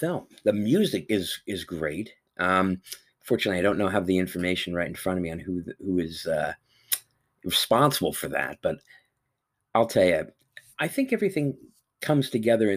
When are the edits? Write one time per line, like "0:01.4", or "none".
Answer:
0:01.1